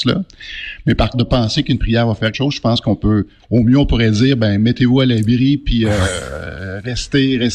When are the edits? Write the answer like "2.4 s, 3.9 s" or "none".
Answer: 1.1 s, 2.3 s